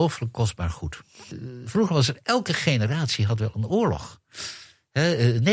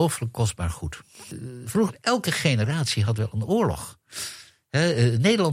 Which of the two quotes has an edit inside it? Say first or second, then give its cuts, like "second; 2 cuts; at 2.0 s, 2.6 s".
second; 1 cut; at 1.9 s